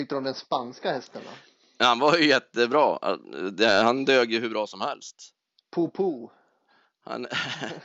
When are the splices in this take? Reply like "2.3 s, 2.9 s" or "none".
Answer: none